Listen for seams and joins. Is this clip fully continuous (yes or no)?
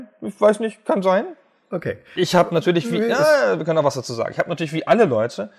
yes